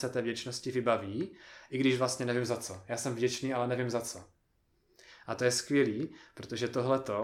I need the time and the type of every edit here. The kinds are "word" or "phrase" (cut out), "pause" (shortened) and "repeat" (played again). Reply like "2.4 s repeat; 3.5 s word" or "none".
none